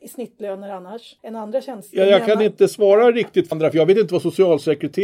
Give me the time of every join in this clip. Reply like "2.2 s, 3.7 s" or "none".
1.2 s, 3.5 s